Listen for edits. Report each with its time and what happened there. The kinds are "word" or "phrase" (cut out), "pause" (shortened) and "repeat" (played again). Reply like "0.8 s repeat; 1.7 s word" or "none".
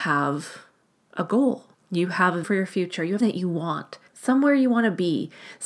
1.7 s pause; 2.4 s word; 3.2 s word; 4.1 s pause